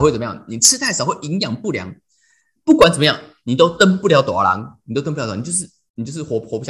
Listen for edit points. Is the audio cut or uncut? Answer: uncut